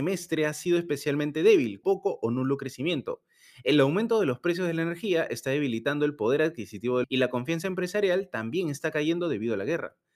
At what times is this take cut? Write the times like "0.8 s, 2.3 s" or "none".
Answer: 1.8 s, 7.0 s